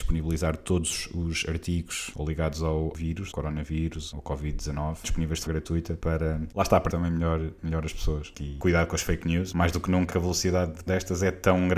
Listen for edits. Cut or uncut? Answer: cut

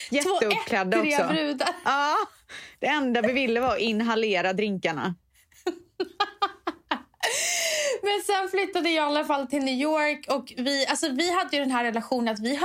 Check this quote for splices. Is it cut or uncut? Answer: uncut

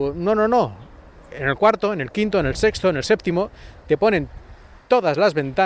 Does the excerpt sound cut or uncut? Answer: uncut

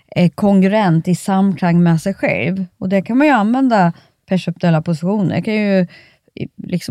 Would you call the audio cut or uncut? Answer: uncut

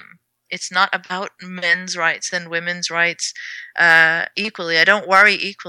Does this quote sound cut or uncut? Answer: uncut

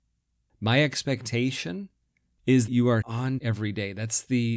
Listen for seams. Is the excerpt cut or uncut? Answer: cut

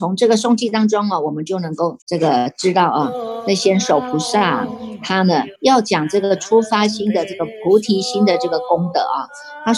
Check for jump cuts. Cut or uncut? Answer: cut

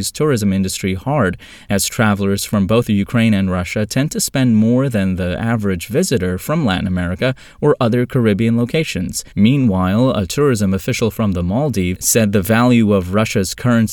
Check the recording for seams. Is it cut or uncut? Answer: cut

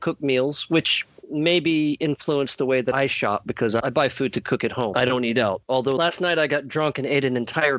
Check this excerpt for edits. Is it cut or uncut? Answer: uncut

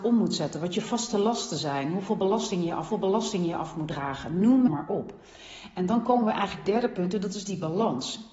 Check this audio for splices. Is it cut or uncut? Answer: cut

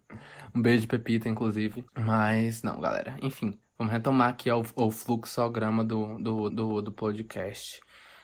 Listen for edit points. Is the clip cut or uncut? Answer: cut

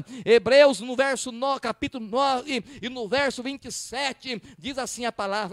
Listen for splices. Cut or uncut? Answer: uncut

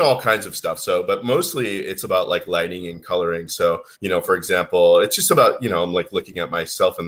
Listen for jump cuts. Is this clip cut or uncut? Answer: cut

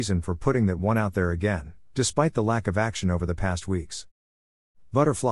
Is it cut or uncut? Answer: uncut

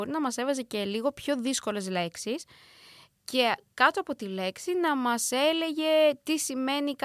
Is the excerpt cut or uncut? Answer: uncut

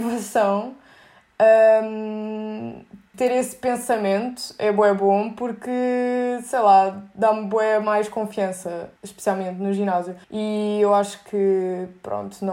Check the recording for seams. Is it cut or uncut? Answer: cut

